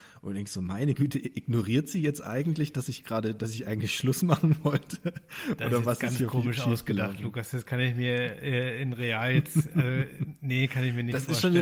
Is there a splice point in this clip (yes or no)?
no